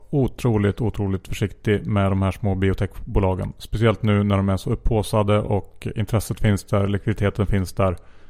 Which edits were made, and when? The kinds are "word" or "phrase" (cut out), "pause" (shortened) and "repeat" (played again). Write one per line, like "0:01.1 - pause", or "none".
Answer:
none